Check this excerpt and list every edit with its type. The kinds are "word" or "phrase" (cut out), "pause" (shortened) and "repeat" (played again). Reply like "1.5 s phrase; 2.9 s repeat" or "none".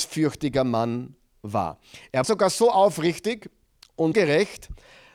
2.2 s word; 4.1 s word